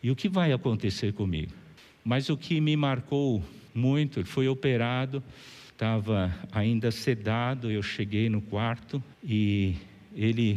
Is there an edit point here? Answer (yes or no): yes